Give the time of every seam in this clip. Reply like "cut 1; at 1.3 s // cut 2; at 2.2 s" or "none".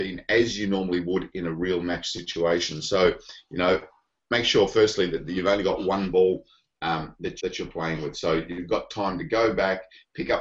cut 1; at 7.4 s